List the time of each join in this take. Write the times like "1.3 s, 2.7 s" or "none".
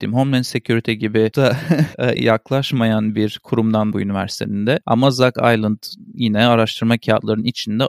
1.3 s, 2.2 s, 3.9 s